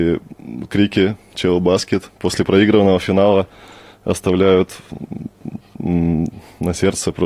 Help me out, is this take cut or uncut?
uncut